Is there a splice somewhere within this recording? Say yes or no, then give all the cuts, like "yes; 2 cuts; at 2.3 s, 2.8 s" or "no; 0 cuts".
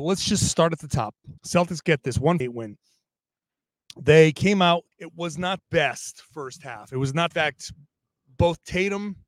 yes; 5 cuts; at 1.4 s, 2.4 s, 4.9 s, 5.6 s, 7.3 s